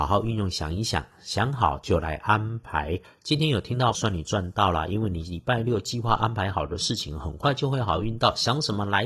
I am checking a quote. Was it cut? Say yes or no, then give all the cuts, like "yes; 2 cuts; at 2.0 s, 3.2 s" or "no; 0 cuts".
yes; 1 cut; at 3.9 s